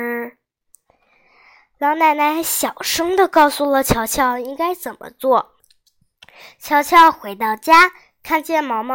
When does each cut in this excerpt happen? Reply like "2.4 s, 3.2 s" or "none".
5.6 s